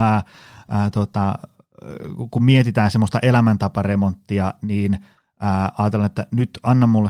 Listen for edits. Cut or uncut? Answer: uncut